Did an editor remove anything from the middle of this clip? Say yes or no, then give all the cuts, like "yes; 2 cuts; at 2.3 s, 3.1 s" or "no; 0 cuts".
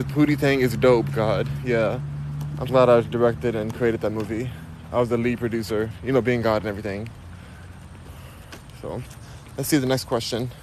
yes; 1 cut; at 2.7 s